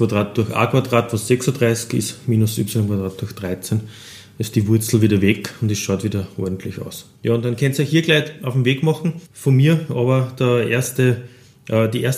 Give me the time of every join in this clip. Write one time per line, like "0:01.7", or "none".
0:07.1
0:09.3